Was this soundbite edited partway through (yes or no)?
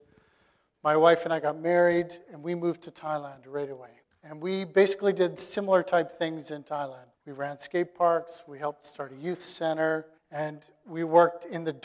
yes